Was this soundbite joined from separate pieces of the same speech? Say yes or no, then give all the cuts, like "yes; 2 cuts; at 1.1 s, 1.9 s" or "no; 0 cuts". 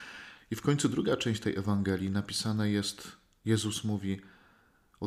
no; 0 cuts